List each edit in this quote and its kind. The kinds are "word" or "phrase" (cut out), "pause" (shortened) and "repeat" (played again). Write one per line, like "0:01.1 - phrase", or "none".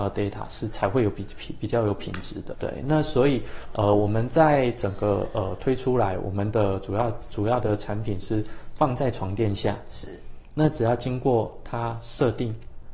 0:02.5 - word